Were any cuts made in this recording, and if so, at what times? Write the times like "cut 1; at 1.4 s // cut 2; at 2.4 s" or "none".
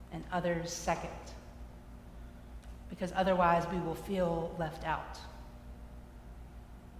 none